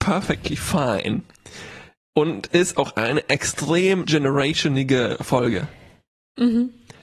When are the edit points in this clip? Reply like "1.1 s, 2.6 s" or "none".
2.5 s, 4.0 s